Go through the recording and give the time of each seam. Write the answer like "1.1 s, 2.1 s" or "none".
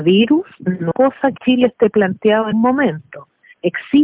0.9 s, 1.4 s, 2.5 s